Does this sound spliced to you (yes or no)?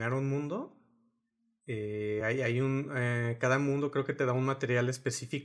no